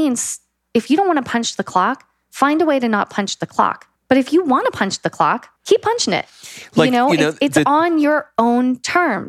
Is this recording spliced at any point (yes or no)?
yes